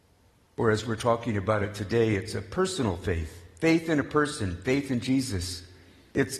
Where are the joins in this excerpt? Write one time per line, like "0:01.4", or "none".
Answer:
none